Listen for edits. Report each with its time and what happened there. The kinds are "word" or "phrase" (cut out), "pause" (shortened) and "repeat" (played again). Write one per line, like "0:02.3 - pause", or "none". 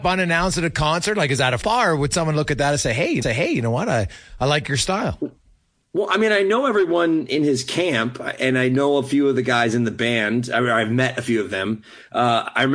0:01.6 - word
0:03.2 - repeat